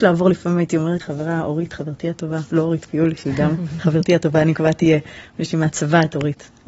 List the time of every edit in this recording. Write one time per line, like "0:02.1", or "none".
0:01.0